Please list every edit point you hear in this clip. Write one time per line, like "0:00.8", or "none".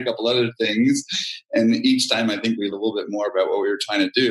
0:02.7